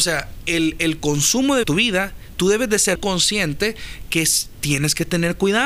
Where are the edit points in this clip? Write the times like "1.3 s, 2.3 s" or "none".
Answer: 1.6 s, 2.9 s